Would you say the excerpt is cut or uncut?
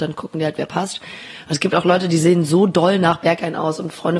uncut